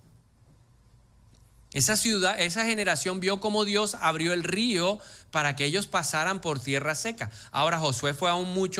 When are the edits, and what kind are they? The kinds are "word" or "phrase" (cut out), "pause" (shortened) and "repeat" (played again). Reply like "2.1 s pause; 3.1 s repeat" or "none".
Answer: none